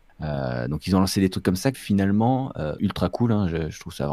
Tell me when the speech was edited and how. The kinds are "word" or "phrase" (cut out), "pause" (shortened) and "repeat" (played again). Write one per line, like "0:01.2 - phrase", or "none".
0:01.7 - word
0:02.8 - word

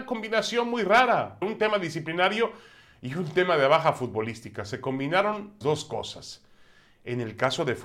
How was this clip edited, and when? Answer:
0:01.4 - word
0:05.6 - word

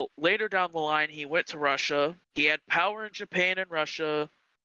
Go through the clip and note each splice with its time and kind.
0:02.2 - pause

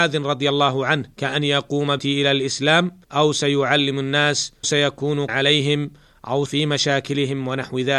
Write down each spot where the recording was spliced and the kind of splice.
0:01.1 - pause
0:02.0 - word
0:03.0 - pause
0:04.6 - word
0:05.3 - word
0:06.5 - word

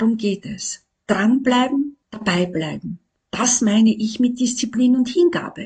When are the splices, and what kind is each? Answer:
0:02.0 - pause
0:03.2 - pause

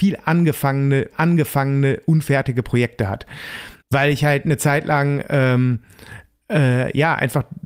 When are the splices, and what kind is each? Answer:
0:01.1 - repeat
0:03.8 - pause

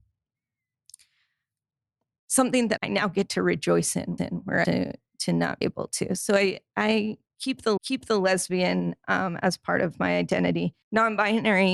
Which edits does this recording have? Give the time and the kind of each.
0:02.8 - word
0:04.2 - repeat
0:04.6 - word
0:05.6 - word
0:07.8 - repeat
0:10.8 - pause

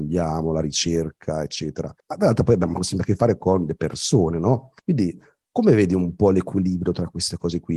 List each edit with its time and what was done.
0:02.0 - pause
0:04.8 - pause

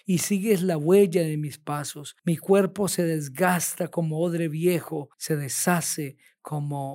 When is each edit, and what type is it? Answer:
0:02.2 - pause
0:05.1 - pause

